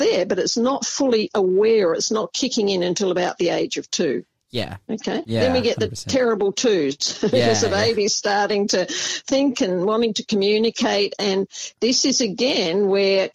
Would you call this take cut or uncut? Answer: uncut